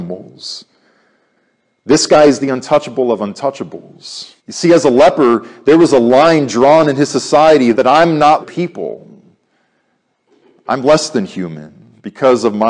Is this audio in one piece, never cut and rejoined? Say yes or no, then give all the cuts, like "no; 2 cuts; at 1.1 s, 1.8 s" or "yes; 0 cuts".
no; 3 cuts; at 4.4 s, 7.7 s, 8.4 s